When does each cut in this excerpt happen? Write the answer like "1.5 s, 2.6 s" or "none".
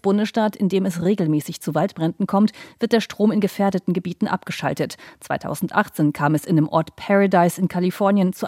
none